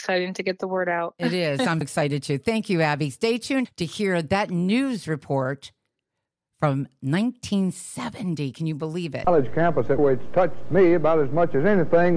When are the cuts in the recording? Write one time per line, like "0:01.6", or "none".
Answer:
0:01.8
0:03.6
0:10.0